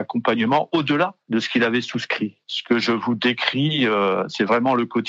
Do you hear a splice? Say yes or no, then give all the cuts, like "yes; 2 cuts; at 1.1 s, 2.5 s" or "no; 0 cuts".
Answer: yes; 1 cut; at 1.2 s